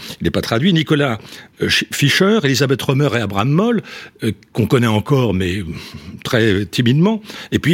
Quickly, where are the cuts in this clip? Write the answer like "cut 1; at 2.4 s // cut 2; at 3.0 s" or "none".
none